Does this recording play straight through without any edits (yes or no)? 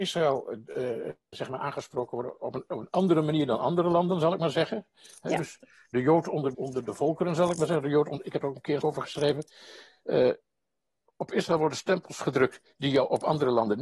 no